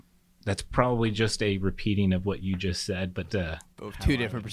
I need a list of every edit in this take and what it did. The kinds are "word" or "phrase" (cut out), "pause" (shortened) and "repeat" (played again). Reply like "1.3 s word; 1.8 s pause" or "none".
3.3 s word